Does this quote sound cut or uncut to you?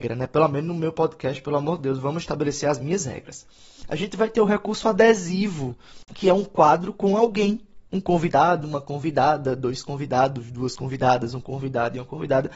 cut